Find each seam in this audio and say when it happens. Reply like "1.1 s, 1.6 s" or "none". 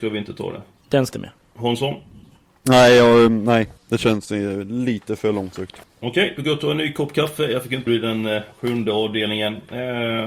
1.1 s, 3.8 s, 5.8 s, 7.9 s